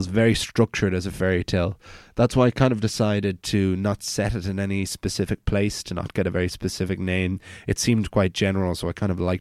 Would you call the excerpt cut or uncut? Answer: uncut